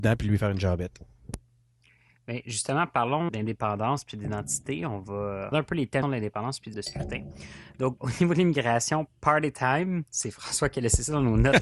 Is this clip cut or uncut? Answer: cut